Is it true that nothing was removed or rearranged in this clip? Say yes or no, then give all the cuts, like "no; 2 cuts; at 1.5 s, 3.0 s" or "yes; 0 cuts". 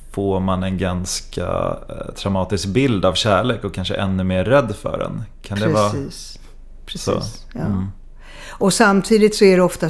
yes; 0 cuts